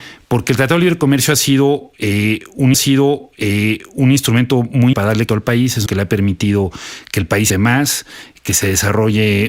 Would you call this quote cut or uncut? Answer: cut